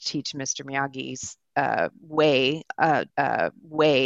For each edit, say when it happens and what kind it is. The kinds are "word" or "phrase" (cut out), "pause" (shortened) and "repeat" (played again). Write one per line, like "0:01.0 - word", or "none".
0:03.1 - repeat